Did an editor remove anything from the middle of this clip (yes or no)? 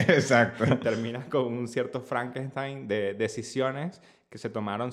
no